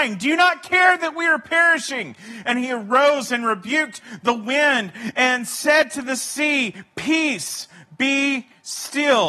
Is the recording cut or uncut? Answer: uncut